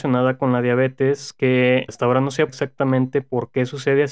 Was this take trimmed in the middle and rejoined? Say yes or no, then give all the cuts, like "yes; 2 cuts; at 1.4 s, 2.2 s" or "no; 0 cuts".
yes; 2 cuts; at 1.9 s, 2.5 s